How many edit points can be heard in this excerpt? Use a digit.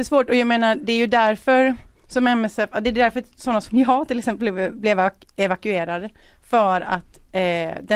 1